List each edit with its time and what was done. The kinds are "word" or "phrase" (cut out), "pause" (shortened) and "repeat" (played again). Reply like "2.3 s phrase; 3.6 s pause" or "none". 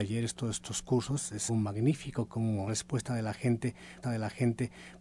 1.5 s word; 2.7 s word; 4.0 s repeat

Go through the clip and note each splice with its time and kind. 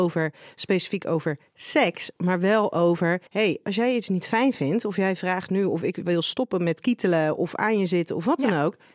3.3 s pause

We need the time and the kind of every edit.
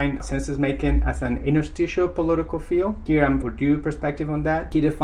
3.4 s word

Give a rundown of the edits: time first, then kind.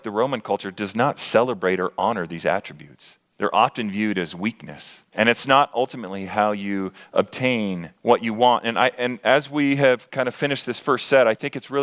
3.3 s pause; 5.1 s pause; 8.0 s pause

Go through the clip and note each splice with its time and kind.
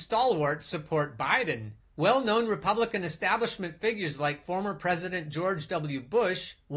1.8 s pause

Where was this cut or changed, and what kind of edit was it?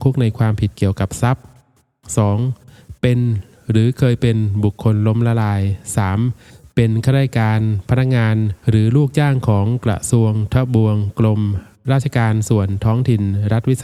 8.6 s pause

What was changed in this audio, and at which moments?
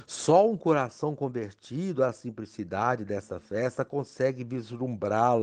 none

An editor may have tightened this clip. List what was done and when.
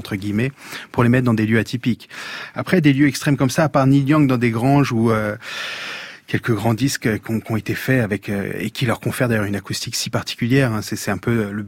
none

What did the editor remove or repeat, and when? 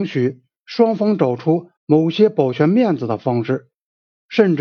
1.8 s pause

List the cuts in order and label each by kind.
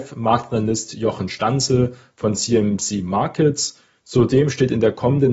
none

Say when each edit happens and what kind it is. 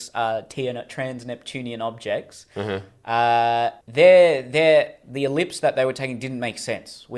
3.8 s pause

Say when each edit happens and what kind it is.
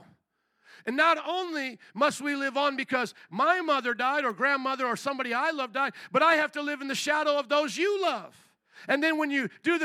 none

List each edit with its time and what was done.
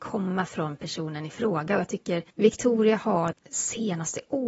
2.3 s pause; 3.3 s word

